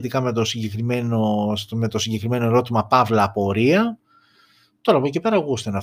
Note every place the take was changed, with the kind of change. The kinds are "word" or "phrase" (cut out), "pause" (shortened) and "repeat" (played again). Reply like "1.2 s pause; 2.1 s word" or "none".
none